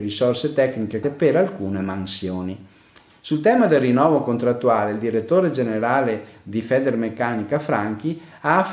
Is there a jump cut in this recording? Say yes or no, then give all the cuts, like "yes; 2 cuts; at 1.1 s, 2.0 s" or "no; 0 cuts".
yes; 1 cut; at 1.0 s